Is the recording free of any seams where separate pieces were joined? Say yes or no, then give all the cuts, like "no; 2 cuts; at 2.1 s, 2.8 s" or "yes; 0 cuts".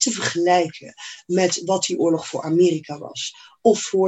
yes; 0 cuts